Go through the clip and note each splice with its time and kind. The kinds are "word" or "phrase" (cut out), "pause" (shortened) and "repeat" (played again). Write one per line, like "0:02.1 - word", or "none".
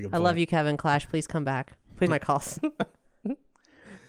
0:02.1 - word